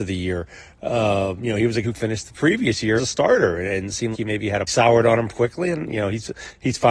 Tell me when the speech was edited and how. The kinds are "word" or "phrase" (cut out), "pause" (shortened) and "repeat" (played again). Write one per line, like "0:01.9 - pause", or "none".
0:01.8 - word
0:03.0 - word
0:04.1 - word
0:04.7 - phrase
0:05.3 - word